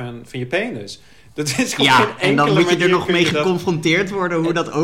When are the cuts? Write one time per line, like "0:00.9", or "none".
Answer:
none